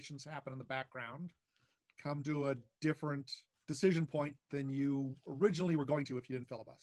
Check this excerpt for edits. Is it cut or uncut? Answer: uncut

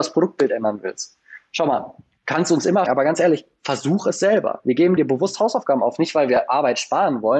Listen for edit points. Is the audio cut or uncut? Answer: cut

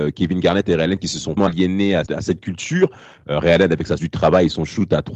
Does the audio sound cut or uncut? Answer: cut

